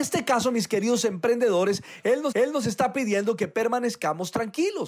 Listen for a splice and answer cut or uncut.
cut